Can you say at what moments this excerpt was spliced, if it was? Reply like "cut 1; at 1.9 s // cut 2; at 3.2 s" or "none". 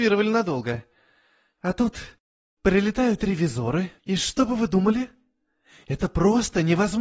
cut 1; at 4.0 s